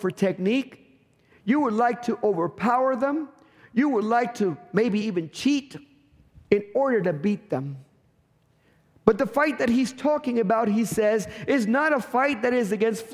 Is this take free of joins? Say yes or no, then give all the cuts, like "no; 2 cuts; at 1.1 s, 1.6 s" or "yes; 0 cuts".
yes; 0 cuts